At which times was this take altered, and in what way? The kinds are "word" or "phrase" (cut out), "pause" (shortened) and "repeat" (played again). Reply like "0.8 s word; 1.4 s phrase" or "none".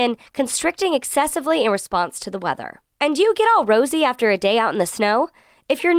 2.9 s pause

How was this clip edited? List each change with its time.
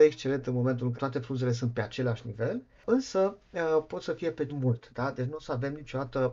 0.9 s word; 4.5 s word

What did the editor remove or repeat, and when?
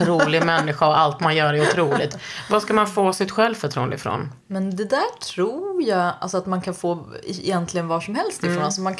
4.4 s pause

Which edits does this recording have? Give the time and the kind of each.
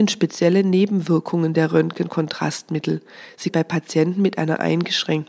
3.5 s phrase

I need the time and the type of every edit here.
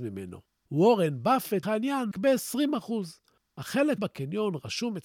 1.6 s word; 2.1 s word; 4.0 s word

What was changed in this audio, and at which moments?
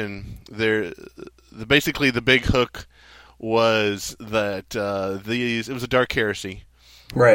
none

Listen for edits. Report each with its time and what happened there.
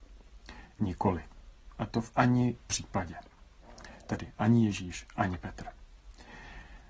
2.6 s word

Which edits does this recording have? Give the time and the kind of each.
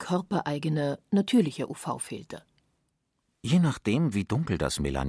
none

